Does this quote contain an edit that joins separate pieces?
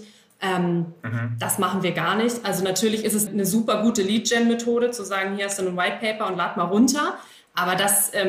yes; 1 cut; at 3.3 s

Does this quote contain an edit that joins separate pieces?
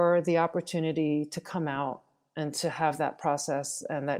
no; 0 cuts

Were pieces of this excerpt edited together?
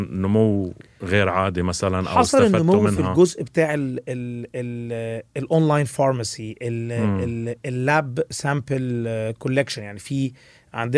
no; 0 cuts

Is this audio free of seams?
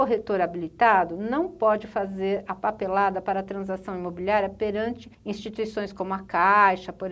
no; 1 cut; at 5.1 s

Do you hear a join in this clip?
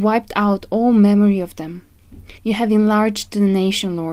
yes; 1 cut; at 2.4 s

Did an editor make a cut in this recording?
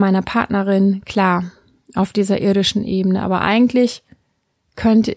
no; 0 cuts

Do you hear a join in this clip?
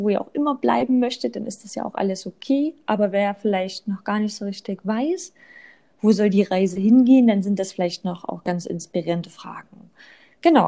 no; 0 cuts

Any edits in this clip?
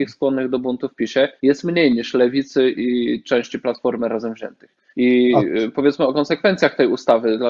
yes; 2 cuts; at 1.4 s, 4.9 s

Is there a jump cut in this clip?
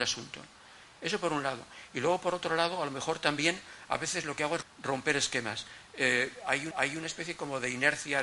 yes; 2 cuts; at 4.6 s, 6.7 s

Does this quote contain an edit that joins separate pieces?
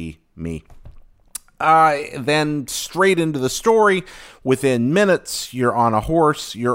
no; 0 cuts

